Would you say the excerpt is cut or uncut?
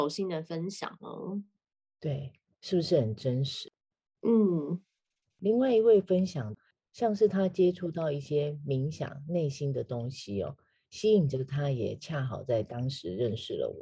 uncut